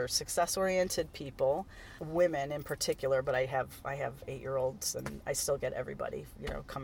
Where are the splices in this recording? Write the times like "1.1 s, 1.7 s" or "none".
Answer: none